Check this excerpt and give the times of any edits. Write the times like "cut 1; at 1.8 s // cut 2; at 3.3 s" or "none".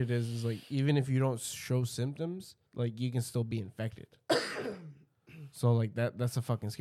cut 1; at 2.7 s